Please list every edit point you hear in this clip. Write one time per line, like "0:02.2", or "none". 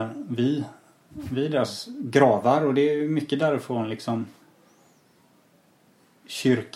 none